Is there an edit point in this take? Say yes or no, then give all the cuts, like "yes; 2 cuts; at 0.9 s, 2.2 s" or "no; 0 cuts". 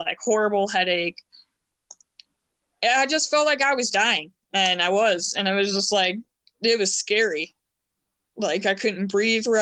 no; 0 cuts